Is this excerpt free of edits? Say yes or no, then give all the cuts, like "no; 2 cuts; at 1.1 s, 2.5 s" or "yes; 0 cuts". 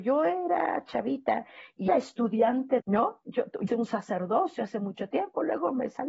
no; 3 cuts; at 1.9 s, 2.8 s, 3.7 s